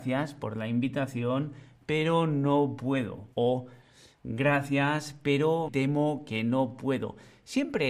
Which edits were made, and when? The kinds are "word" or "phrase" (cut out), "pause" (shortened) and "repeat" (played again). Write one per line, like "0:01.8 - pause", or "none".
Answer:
0:03.3 - pause
0:05.7 - word